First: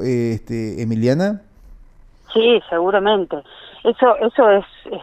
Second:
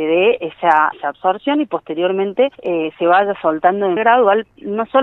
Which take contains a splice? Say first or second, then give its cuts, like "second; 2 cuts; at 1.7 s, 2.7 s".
second; 3 cuts; at 0.9 s, 2.5 s, 4.0 s